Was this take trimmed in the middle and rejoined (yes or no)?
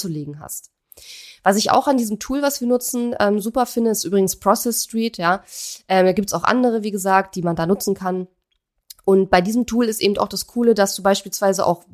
no